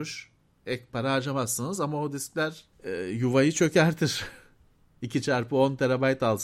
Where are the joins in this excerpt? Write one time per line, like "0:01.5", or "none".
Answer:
0:02.7